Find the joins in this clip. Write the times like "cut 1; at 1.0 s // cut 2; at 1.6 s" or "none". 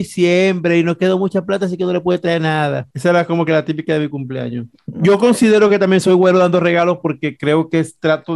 none